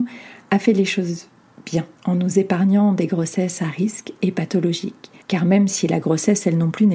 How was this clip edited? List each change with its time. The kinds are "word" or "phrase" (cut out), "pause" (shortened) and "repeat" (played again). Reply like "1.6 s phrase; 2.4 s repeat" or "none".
1.9 s pause; 5.2 s pause